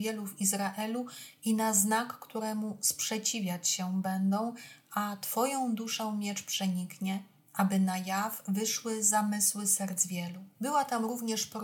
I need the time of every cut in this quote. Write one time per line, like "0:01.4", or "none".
none